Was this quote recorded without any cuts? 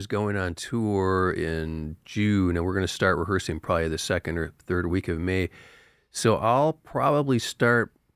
yes; 0 cuts

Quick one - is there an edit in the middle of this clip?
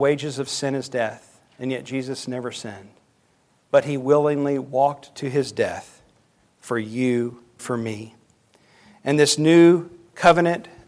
yes; 1 cut; at 7.6 s

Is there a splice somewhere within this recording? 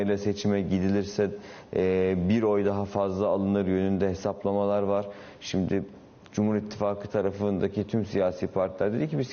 no; 0 cuts

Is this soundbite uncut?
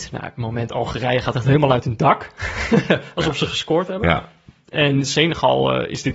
yes; 0 cuts

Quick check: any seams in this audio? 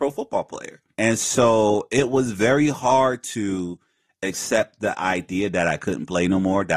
no; 0 cuts

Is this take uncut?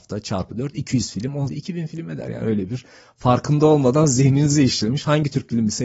no; 1 cut; at 1.5 s

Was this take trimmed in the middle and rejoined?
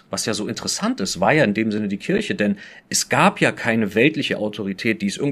no; 0 cuts

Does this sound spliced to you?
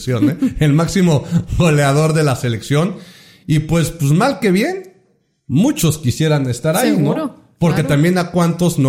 no; 0 cuts

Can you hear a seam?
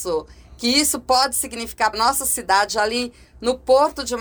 yes; 1 cut; at 1.9 s

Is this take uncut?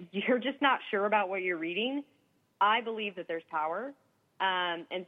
yes; 0 cuts

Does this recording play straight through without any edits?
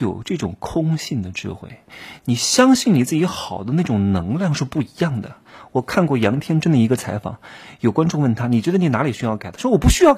yes; 0 cuts

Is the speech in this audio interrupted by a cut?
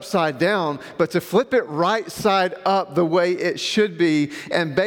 no; 0 cuts

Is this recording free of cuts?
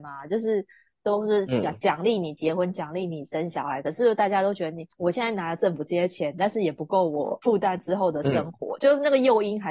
no; 1 cut; at 4.9 s

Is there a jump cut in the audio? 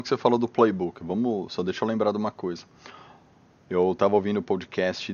no; 0 cuts

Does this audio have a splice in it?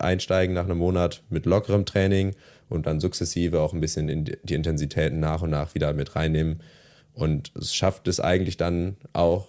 no; 0 cuts

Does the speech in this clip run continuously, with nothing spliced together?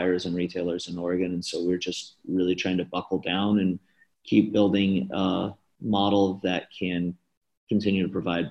yes; 0 cuts

